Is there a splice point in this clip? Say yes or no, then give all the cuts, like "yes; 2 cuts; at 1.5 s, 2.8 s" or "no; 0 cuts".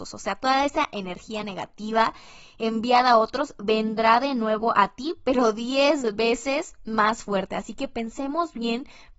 no; 0 cuts